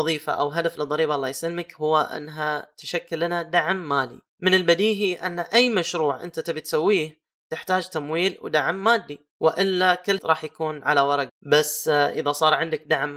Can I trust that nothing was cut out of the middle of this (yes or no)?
no